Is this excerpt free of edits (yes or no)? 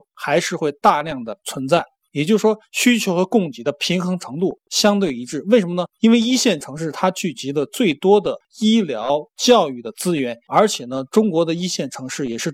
yes